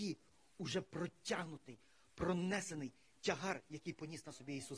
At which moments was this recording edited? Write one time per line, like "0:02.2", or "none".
none